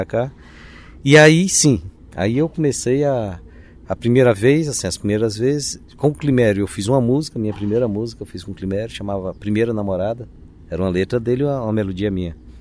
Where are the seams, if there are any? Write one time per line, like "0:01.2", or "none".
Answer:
none